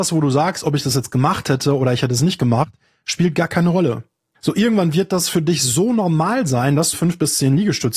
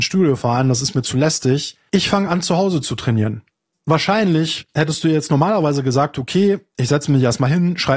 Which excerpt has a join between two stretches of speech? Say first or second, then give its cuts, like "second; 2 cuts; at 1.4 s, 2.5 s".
first; 1 cut; at 6.9 s